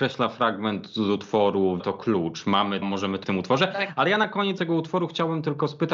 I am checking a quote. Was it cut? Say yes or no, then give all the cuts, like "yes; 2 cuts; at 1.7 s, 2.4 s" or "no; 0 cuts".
yes; 4 cuts; at 1.8 s, 2.8 s, 3.2 s, 4.6 s